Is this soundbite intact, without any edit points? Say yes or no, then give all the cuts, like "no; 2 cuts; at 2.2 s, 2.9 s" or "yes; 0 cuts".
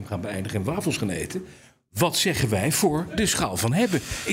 yes; 0 cuts